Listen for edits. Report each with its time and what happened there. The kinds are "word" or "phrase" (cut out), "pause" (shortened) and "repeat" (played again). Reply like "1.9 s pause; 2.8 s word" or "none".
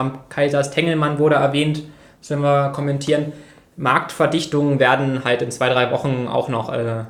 none

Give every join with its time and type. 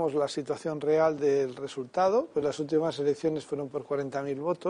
none

